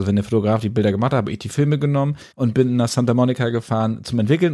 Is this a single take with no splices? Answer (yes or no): no